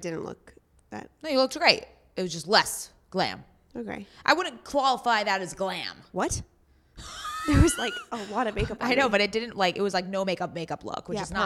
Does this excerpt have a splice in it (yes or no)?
no